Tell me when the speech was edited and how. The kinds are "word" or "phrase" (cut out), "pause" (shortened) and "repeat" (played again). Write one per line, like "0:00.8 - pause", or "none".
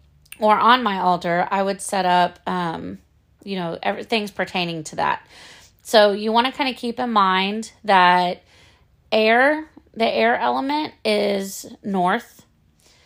none